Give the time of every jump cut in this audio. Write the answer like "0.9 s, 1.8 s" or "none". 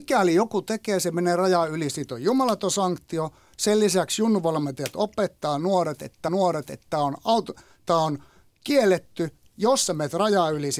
6.3 s